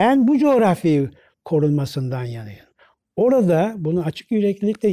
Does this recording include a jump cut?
no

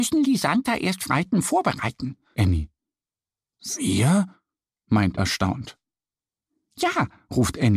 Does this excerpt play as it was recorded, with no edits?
no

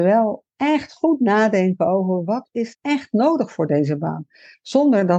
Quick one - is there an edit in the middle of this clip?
yes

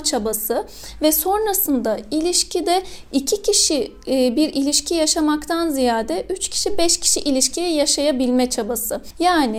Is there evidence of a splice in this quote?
no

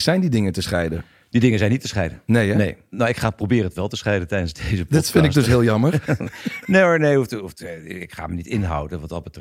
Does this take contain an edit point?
no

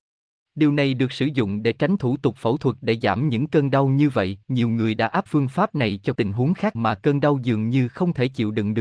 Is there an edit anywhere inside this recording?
yes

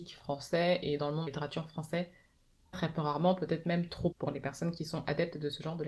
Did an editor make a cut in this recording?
yes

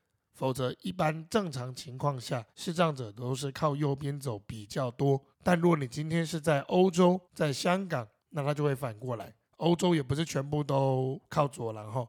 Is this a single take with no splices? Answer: no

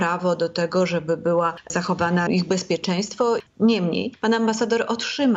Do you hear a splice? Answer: yes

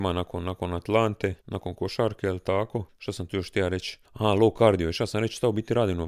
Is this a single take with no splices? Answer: no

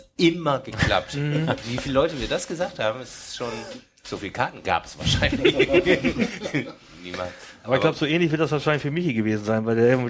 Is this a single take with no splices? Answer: no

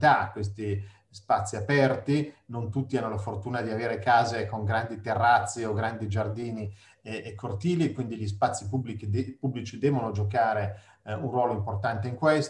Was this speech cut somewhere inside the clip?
no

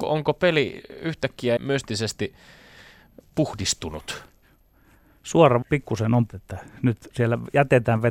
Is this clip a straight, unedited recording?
no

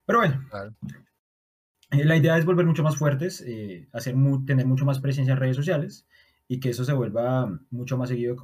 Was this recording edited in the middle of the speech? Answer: no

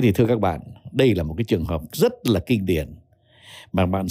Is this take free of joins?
yes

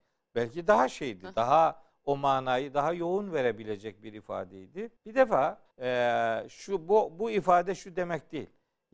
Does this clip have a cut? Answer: yes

